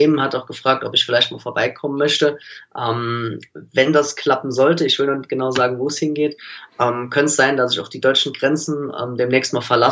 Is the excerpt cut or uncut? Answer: uncut